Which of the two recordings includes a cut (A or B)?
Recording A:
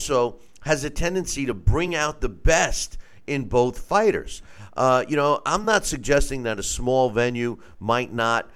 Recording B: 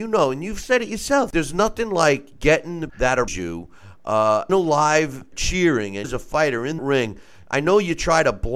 B